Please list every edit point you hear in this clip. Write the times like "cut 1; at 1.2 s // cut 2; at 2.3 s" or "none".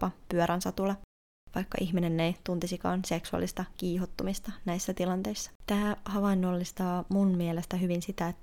cut 1; at 5.6 s